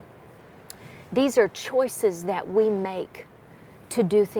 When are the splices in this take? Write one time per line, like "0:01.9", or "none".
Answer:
none